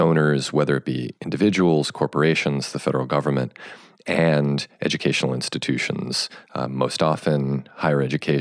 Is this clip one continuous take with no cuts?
yes; 0 cuts

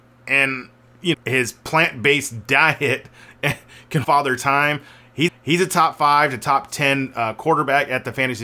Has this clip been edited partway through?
yes; 3 cuts; at 1.1 s, 4.0 s, 5.3 s

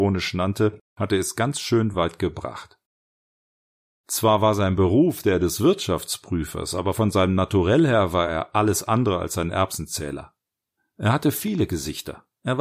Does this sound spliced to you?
no; 0 cuts

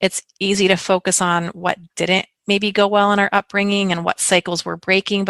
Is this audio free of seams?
yes; 0 cuts

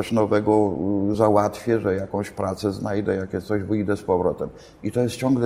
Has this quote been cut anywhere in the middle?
no; 0 cuts

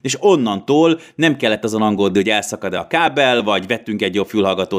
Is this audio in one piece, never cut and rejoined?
yes; 0 cuts

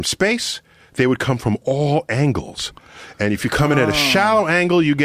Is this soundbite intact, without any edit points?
yes; 0 cuts

